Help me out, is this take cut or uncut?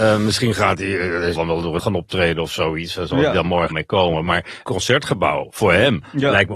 cut